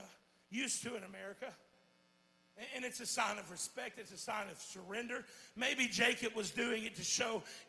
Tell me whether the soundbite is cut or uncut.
uncut